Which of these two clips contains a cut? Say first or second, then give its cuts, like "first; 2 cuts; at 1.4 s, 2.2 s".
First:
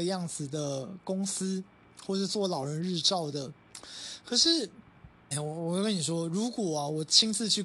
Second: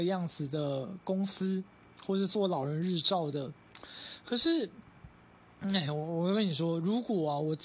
first; 1 cut; at 5.3 s